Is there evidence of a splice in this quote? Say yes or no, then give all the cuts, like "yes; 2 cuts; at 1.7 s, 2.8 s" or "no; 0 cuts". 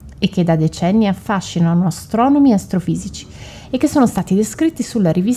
no; 0 cuts